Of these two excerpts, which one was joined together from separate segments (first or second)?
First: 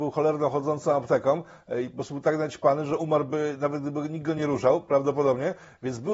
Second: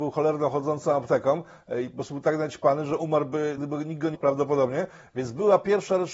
second